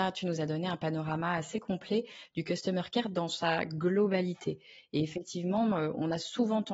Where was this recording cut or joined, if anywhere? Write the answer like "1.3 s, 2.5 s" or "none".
none